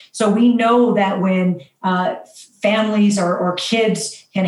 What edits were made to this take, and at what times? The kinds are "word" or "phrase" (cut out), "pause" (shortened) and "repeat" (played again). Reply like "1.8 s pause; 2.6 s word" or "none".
none